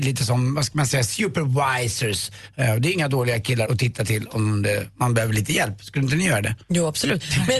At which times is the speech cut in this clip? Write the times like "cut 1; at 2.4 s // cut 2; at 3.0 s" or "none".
cut 1; at 3.6 s // cut 2; at 6.6 s